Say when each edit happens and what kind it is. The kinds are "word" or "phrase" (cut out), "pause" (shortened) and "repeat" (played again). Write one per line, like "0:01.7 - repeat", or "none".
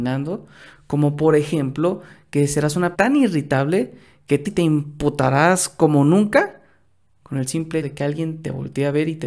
0:02.9 - word
0:04.4 - word
0:07.8 - word